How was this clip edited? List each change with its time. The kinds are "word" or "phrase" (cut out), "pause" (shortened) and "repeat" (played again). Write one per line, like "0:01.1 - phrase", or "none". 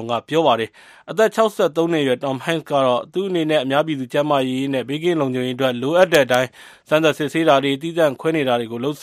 none